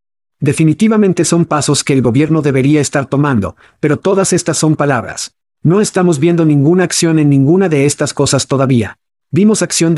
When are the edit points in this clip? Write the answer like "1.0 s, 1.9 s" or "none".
none